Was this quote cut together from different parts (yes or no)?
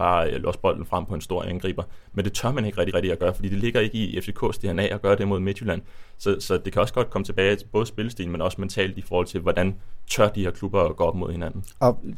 yes